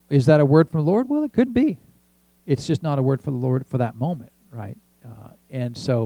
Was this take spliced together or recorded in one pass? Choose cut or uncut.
uncut